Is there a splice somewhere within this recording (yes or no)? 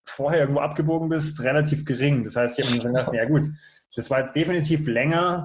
no